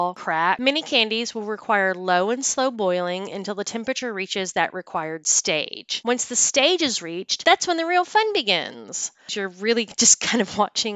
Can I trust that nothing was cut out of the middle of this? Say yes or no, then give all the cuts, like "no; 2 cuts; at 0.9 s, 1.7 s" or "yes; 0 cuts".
no; 1 cut; at 9.3 s